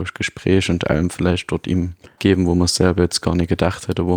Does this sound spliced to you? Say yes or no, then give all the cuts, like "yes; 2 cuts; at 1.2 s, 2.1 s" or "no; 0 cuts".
yes; 1 cut; at 2.2 s